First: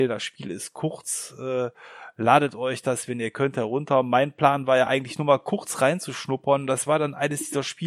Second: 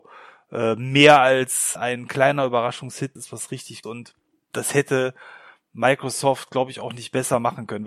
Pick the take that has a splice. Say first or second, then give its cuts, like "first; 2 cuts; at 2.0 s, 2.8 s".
second; 4 cuts; at 1.8 s, 3.2 s, 3.8 s, 4.4 s